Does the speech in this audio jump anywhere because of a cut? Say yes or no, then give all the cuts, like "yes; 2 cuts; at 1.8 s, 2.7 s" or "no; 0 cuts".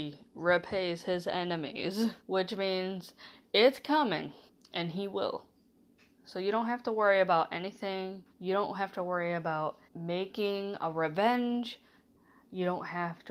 yes; 5 cuts; at 2.2 s, 4.5 s, 6.0 s, 8.3 s, 9.8 s